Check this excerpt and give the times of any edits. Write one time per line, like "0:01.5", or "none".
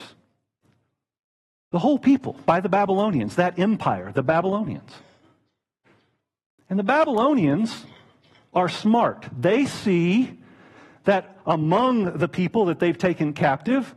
none